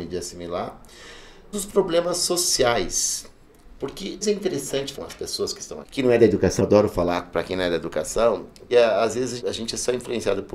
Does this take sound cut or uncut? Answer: cut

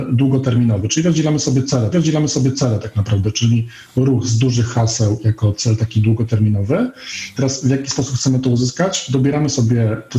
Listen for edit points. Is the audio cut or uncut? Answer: cut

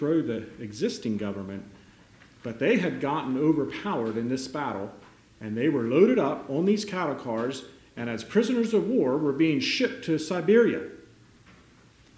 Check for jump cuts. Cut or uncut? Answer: uncut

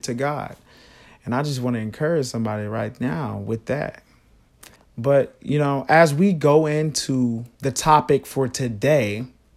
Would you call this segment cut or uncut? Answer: cut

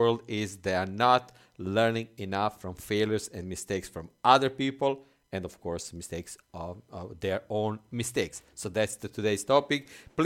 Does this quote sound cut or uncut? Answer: uncut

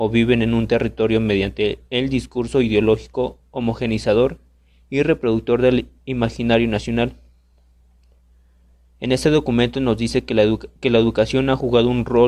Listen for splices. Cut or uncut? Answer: cut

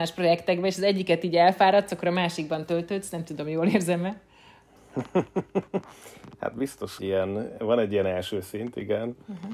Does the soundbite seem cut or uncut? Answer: cut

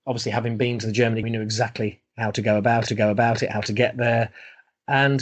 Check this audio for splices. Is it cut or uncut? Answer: cut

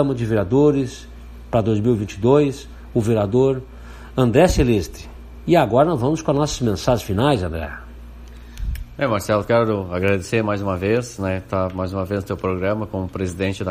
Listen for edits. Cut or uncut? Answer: uncut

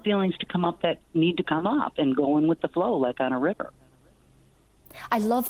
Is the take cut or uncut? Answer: uncut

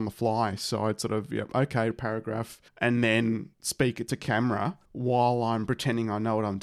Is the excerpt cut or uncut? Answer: cut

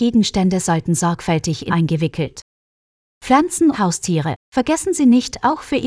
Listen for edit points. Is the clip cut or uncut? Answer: cut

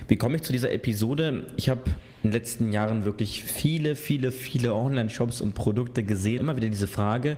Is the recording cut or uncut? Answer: cut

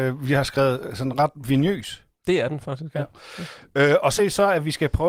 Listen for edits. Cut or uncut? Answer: cut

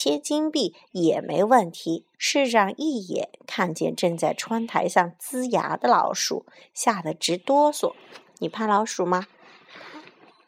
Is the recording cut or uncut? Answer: cut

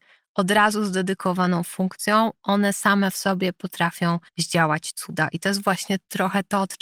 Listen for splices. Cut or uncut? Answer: cut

